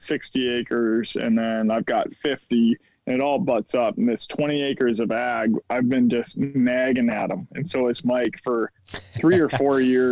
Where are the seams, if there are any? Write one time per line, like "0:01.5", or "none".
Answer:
0:08.8